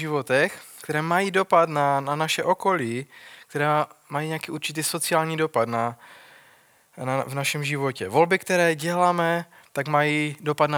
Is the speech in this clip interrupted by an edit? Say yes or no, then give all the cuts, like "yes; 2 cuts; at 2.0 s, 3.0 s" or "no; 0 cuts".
no; 0 cuts